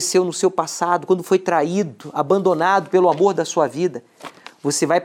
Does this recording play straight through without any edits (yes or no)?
yes